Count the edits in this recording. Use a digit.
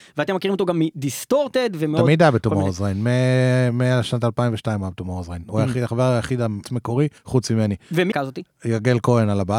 3